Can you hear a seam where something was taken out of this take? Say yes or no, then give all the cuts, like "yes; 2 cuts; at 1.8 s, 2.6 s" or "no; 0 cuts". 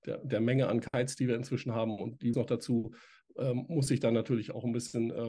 yes; 1 cut; at 2.3 s